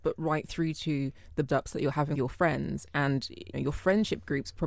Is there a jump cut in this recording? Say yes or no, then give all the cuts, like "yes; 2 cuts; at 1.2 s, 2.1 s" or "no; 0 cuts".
yes; 3 cuts; at 1.5 s, 2.1 s, 3.5 s